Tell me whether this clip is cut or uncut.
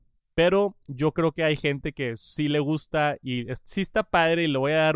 uncut